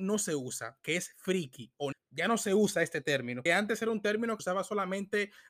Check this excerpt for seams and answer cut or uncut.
cut